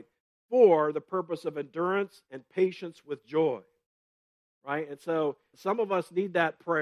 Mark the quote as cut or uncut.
cut